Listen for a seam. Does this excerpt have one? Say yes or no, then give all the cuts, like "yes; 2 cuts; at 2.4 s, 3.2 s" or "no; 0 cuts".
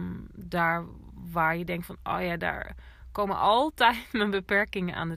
no; 0 cuts